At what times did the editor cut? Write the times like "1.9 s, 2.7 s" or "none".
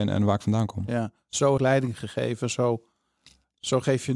1.6 s